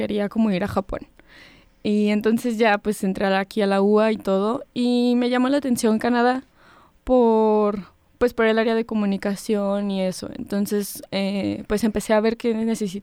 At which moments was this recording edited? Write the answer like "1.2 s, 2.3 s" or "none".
none

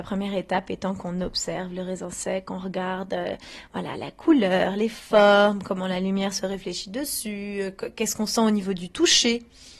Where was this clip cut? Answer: 3.9 s

